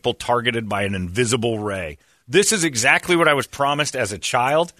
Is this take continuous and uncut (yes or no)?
yes